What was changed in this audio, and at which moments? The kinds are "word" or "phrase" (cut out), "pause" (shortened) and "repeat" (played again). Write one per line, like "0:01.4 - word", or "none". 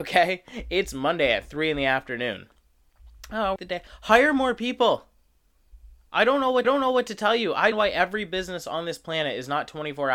0:03.6 - phrase
0:06.6 - repeat
0:07.7 - phrase